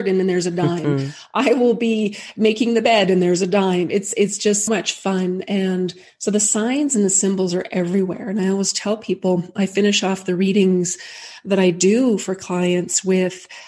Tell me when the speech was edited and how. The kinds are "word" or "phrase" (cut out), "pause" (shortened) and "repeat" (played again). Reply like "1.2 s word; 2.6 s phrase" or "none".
4.7 s word